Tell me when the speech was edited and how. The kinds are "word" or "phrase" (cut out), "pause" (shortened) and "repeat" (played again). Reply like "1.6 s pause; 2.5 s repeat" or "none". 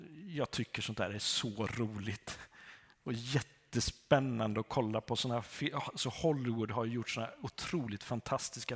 none